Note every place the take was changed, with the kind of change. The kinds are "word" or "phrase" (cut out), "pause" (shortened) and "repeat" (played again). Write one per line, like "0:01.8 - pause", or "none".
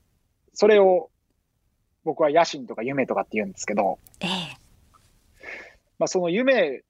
none

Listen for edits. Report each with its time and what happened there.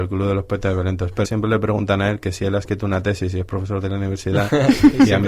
0:01.2 - phrase

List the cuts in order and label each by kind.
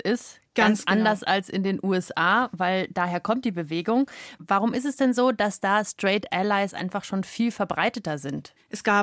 none

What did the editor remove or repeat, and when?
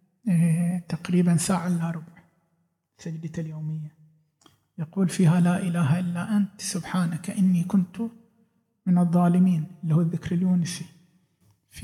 none

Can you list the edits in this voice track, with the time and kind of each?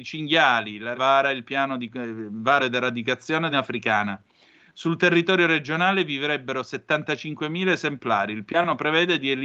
0:00.9 - word
0:02.6 - phrase
0:03.5 - phrase

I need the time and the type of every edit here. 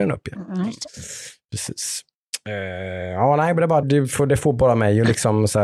0:03.8 - word

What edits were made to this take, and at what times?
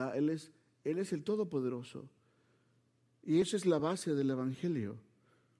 none

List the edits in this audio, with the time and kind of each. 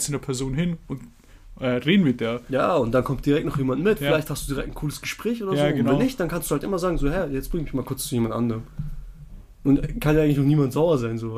none

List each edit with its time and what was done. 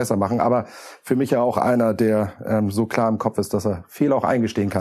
none

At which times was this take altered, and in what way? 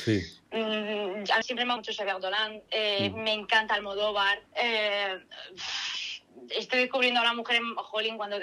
0:01.4 - phrase
0:01.8 - word
0:02.7 - pause
0:04.5 - pause

